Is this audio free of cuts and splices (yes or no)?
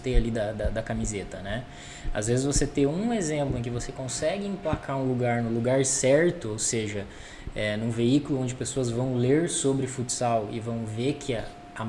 yes